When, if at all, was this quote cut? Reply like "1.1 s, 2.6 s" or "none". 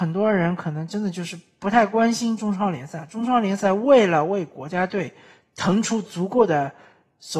none